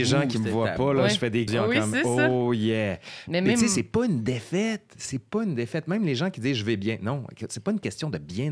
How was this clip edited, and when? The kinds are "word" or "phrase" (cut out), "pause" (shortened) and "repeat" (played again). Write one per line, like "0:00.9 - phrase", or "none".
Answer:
0:01.5 - word